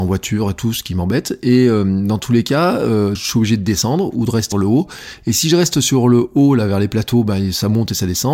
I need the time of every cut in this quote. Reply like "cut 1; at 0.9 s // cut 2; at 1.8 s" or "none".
cut 1; at 3.2 s // cut 2; at 4.5 s